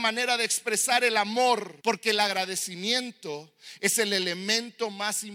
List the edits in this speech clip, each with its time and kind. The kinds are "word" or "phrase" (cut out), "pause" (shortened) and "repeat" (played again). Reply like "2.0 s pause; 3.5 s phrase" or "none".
1.8 s pause